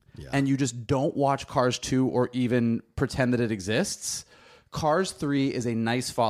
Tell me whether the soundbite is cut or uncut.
uncut